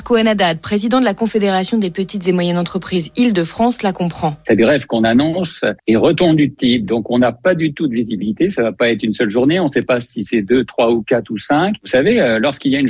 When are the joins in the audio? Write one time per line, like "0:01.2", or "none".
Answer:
0:05.8